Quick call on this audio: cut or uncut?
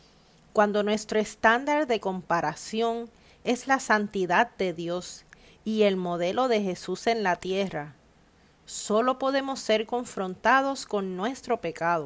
uncut